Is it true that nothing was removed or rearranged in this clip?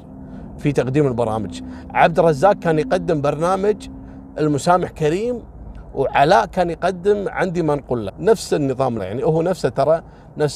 no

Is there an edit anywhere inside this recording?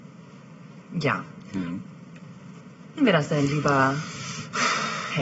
yes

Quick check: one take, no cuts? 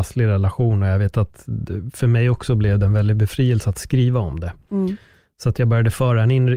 yes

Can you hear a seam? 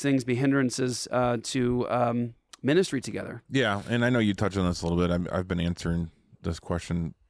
no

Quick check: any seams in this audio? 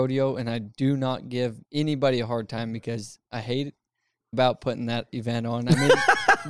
yes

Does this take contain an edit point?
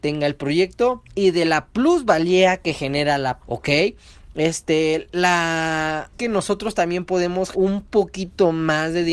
yes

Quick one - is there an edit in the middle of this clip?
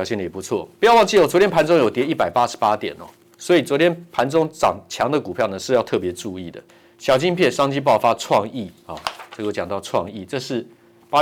yes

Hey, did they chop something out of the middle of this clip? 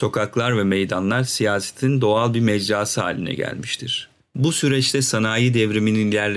no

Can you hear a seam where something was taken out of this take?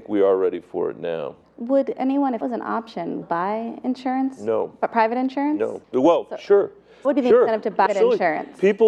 yes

